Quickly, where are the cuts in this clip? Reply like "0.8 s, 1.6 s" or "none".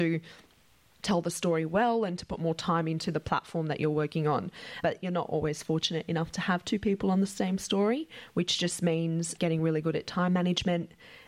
none